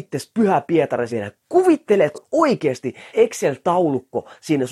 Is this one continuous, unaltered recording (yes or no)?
no